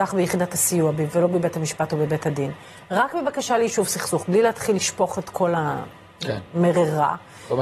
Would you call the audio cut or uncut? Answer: uncut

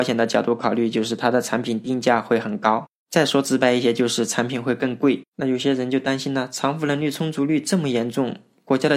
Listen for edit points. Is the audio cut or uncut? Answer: cut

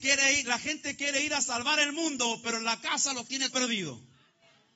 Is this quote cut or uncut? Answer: cut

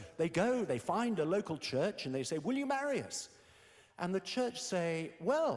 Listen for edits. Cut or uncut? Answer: uncut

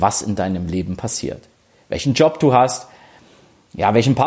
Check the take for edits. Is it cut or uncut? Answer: uncut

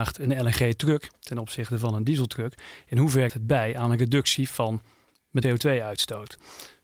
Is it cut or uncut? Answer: cut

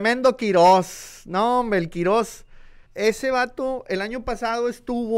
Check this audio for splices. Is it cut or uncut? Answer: cut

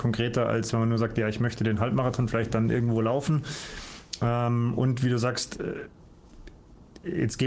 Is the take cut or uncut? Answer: uncut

